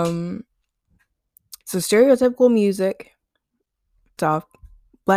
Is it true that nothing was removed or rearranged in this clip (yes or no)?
no